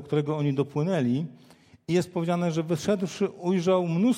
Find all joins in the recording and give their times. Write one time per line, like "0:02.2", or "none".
none